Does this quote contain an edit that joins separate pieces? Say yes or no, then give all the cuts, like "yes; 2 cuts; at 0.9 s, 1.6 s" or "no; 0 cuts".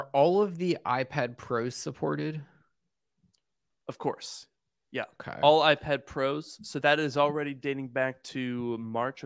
yes; 1 cut; at 6.8 s